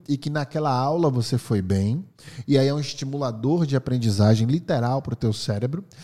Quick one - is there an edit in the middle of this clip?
no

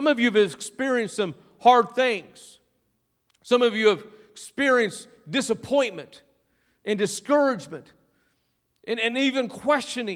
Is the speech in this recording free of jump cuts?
yes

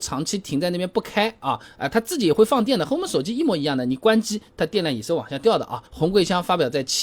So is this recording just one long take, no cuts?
no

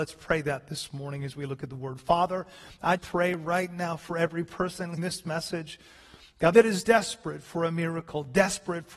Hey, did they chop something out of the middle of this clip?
yes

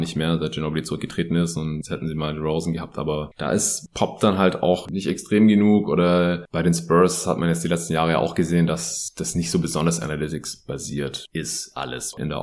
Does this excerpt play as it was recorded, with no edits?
yes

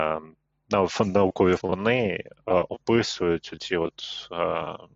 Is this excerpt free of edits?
no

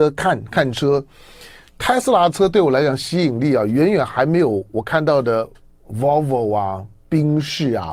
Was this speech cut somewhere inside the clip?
no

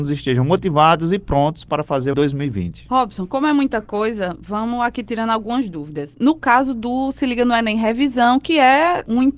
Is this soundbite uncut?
no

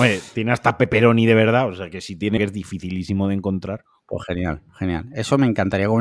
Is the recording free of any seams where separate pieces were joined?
no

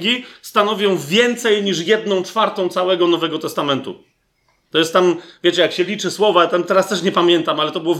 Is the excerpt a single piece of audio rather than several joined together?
yes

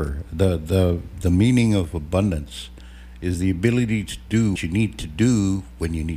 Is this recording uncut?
no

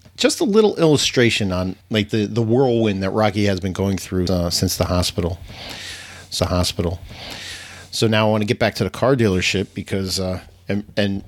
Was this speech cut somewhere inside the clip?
yes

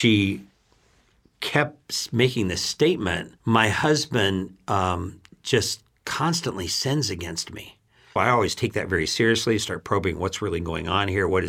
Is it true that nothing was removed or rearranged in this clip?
no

